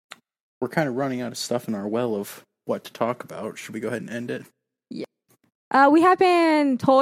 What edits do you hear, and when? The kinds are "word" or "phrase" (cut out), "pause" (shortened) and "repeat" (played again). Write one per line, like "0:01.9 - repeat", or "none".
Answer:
none